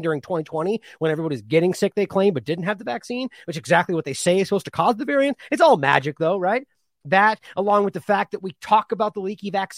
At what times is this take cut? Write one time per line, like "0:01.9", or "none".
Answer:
none